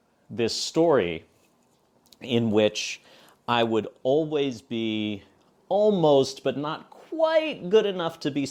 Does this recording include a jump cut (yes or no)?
no